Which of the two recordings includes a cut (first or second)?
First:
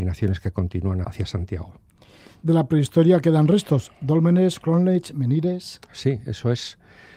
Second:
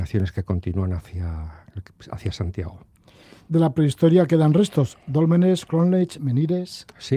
first